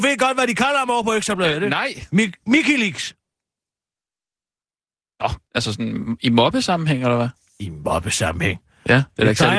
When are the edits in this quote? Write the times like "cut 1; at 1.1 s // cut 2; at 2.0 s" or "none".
cut 1; at 5.4 s